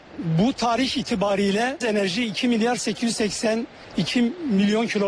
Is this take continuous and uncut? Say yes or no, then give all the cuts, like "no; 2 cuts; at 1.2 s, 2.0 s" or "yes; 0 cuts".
no; 1 cut; at 1.8 s